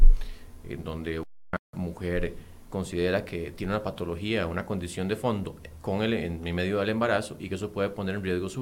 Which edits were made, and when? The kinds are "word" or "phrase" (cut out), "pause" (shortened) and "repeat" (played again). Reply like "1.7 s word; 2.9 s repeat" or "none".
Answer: none